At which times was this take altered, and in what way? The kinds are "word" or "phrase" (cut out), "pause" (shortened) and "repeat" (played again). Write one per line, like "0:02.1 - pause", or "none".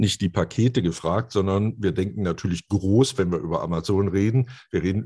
none